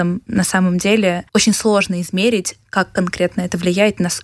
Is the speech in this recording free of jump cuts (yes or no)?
no